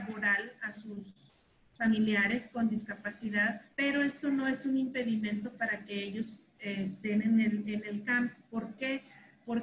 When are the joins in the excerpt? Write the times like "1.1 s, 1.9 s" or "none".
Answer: 3.7 s